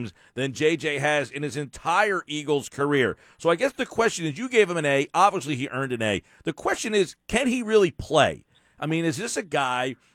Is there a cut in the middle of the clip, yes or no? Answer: no